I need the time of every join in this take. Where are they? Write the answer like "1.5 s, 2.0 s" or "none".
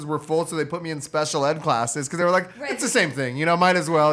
none